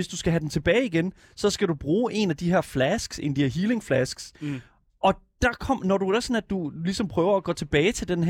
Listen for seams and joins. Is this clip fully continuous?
yes; 0 cuts

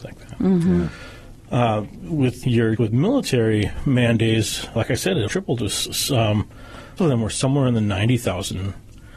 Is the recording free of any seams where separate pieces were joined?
no; 5 cuts; at 2.4 s, 2.8 s, 4.8 s, 5.3 s, 7.0 s

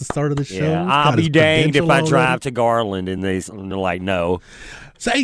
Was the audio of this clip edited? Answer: no; 0 cuts

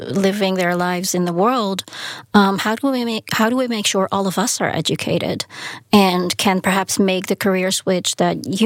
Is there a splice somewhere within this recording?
no; 0 cuts

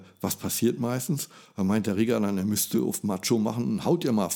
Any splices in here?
no; 0 cuts

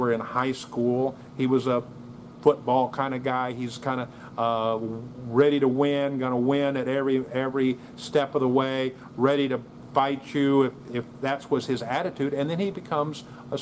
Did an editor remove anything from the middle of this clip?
no; 0 cuts

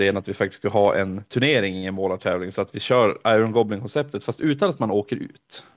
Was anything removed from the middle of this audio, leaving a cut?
no; 0 cuts

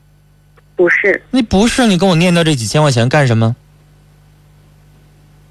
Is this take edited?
yes; 1 cut; at 1.3 s

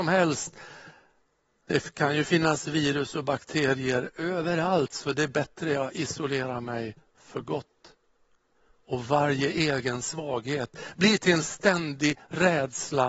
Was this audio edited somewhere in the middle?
no; 0 cuts

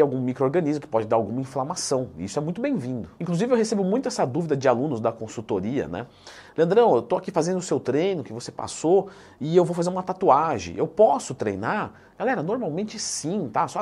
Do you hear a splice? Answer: no; 0 cuts

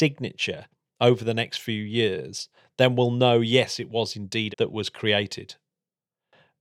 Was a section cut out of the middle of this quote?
yes; 1 cut; at 4.5 s

